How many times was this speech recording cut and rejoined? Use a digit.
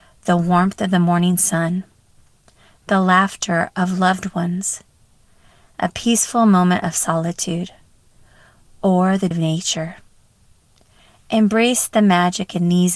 1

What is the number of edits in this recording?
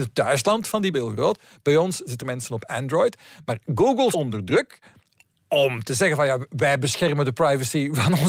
3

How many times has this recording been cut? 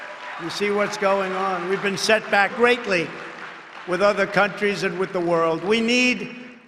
1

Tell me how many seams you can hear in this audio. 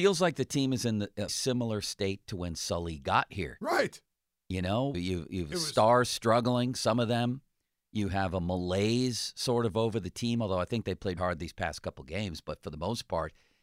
3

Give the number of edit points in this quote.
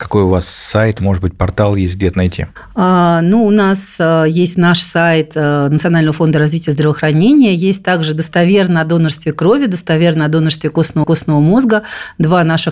2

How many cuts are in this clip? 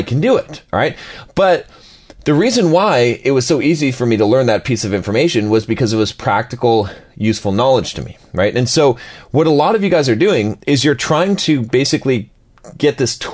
0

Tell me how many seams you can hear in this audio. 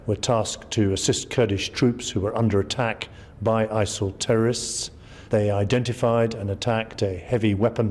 1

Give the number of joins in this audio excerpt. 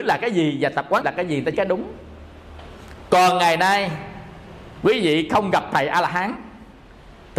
2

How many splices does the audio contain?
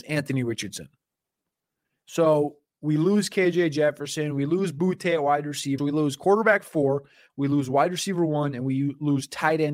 1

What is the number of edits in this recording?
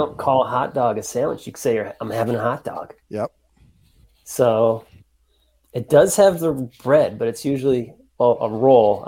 1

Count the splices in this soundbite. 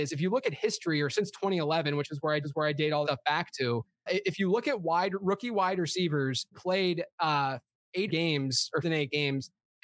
6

